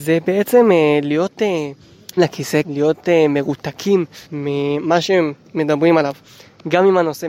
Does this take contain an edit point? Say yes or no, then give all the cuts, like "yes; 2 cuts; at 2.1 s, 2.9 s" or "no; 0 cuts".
yes; 3 cuts; at 2.2 s, 2.6 s, 4.3 s